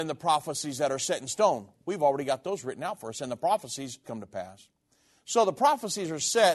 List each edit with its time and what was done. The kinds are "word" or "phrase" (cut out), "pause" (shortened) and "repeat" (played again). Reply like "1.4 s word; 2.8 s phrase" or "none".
4.0 s word